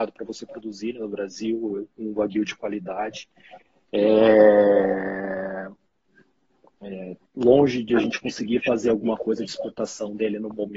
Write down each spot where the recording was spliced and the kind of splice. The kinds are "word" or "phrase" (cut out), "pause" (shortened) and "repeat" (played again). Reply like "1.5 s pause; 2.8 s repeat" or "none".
none